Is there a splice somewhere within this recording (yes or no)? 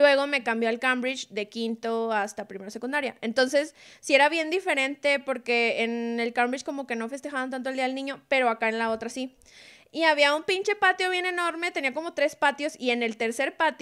no